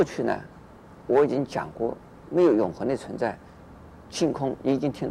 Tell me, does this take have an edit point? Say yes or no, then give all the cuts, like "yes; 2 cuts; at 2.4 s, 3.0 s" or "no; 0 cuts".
no; 0 cuts